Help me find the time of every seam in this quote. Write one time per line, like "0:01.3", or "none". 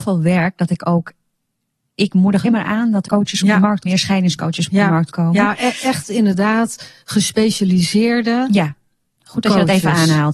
0:02.1
0:02.4
0:03.1
0:03.9